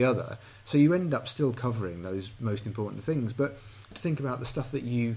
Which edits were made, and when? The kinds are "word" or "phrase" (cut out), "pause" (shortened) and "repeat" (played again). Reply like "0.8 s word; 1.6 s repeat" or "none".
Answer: 3.9 s word